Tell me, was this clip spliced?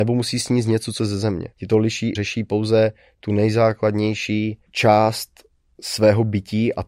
yes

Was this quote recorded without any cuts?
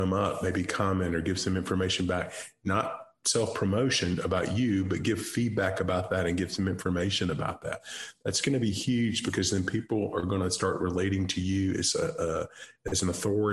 yes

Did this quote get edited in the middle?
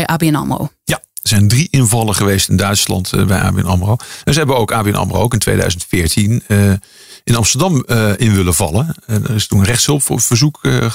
no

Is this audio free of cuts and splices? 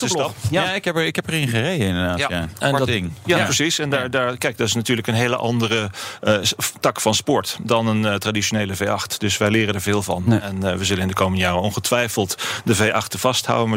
yes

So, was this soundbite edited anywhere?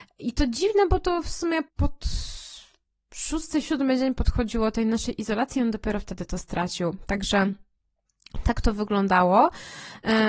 yes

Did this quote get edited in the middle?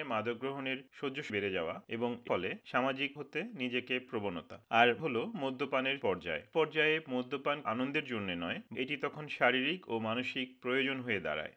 yes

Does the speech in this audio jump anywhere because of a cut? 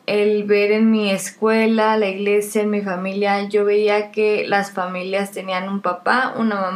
no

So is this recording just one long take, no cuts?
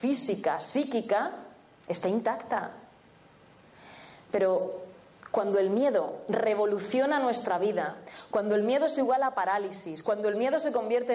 yes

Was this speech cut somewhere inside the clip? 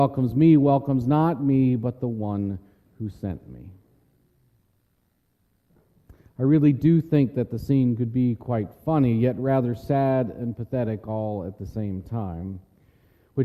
no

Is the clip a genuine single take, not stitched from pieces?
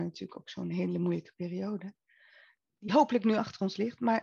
yes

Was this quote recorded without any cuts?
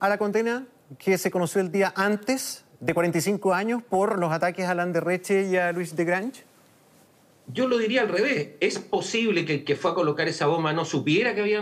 yes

